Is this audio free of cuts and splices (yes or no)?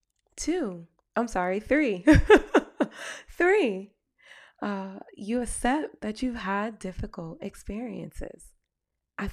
yes